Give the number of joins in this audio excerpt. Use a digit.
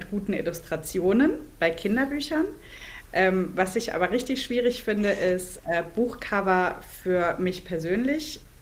0